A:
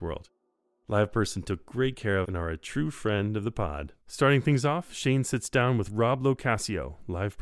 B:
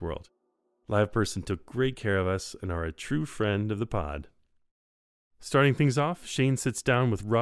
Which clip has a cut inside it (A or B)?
A